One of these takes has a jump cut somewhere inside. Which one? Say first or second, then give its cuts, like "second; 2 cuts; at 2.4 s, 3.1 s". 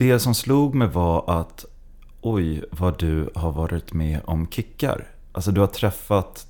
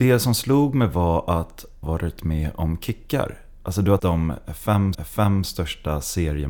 second; 3 cuts; at 1.8 s, 4.0 s, 4.9 s